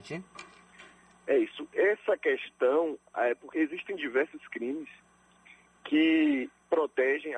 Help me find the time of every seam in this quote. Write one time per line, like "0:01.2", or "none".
0:03.5